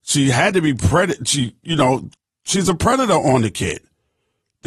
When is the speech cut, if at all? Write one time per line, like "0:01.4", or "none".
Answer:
none